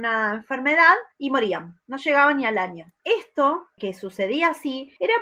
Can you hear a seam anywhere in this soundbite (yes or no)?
no